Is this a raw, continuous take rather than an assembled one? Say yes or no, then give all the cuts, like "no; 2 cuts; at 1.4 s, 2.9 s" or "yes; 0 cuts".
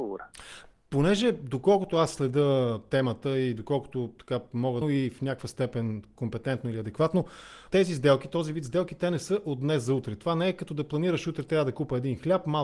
no; 2 cuts; at 4.8 s, 7.7 s